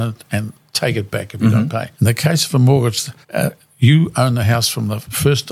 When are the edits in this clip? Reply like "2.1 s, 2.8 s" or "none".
1.9 s, 3.2 s